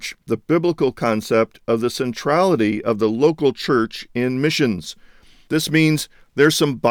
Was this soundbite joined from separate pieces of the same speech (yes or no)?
no